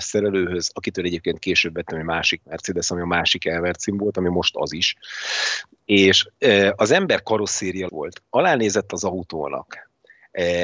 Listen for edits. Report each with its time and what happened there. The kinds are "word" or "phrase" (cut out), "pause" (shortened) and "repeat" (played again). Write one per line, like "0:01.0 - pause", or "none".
0:07.9 - word